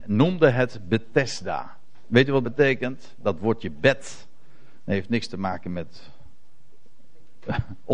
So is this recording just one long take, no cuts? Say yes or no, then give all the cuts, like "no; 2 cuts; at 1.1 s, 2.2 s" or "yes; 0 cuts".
no; 1 cut; at 2.4 s